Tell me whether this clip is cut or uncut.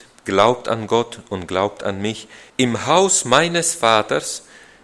cut